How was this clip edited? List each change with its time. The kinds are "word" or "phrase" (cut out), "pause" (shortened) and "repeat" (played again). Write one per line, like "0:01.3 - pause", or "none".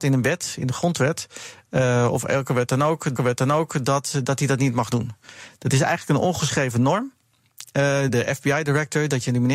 0:03.2 - repeat
0:08.1 - phrase